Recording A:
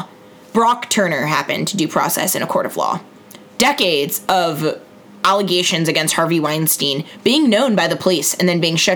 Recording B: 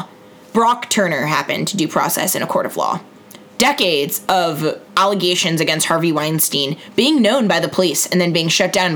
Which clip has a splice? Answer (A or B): B